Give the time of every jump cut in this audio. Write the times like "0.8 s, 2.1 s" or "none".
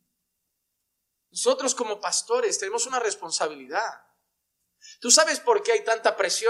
none